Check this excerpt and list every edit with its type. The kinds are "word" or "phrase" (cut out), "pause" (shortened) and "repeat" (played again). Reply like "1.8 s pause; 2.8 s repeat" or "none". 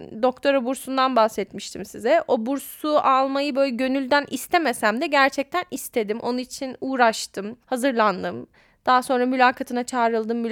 7.6 s pause